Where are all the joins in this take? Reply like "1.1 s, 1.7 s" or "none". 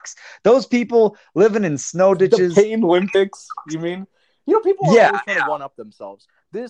none